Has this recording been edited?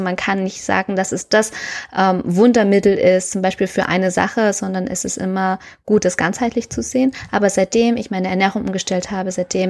no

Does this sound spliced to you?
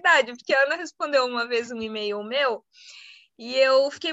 no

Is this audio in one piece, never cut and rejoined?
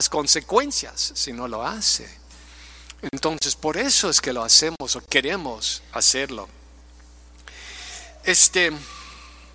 yes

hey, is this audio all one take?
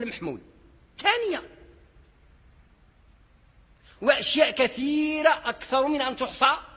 yes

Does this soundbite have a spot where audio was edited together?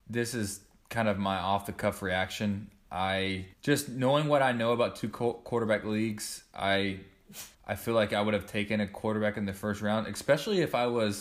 yes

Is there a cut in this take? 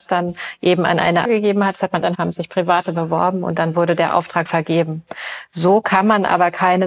yes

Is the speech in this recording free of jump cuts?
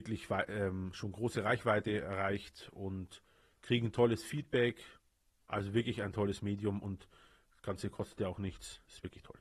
yes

